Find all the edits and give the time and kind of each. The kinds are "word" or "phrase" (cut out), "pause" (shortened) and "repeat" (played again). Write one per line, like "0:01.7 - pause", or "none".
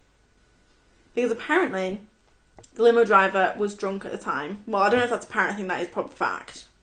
0:02.6 - pause